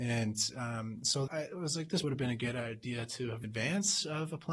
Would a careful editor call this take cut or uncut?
cut